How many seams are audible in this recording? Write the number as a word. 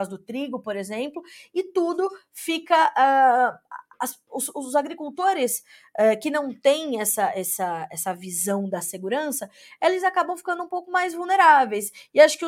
zero